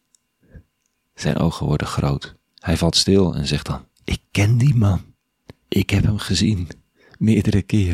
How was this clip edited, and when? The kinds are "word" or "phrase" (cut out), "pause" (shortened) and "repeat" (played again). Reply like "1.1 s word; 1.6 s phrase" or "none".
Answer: 2.5 s pause; 4.0 s pause; 5.6 s pause